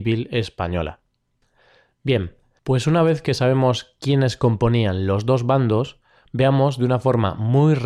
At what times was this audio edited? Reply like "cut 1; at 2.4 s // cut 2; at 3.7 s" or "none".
none